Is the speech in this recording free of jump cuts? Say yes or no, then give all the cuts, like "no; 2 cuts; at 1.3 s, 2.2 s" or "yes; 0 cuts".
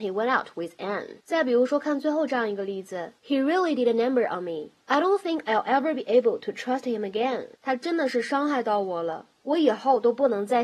no; 5 cuts; at 1.2 s, 3.2 s, 4.8 s, 7.6 s, 9.3 s